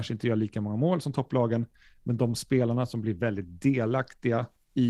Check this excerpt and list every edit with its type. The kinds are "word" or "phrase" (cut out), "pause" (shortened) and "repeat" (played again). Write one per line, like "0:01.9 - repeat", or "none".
none